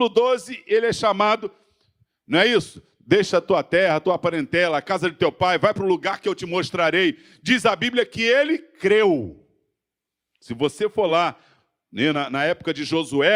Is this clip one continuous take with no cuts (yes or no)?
yes